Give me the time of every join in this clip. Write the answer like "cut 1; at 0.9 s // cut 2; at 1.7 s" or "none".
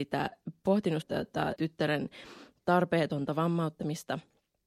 cut 1; at 1.0 s // cut 2; at 1.6 s